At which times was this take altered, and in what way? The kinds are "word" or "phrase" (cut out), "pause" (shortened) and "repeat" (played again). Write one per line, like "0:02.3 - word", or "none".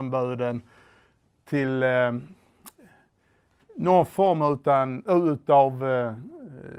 none